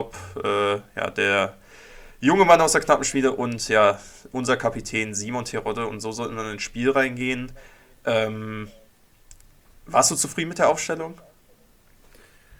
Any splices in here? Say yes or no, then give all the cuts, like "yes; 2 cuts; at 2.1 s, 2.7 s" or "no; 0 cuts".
no; 0 cuts